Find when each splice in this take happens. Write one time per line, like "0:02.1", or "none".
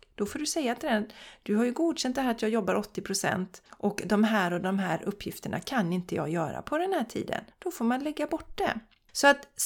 0:03.7
0:07.5